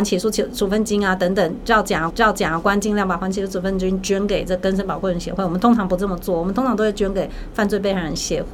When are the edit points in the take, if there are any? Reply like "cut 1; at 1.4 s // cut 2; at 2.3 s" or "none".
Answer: cut 1; at 2.1 s